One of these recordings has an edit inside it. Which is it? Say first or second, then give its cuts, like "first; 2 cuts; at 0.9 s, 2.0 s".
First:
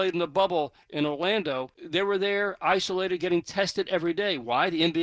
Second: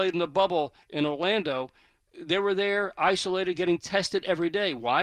first; 1 cut; at 1.7 s